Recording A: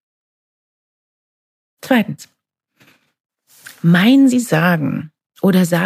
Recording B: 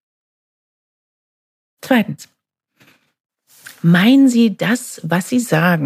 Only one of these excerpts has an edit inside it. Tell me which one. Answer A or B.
A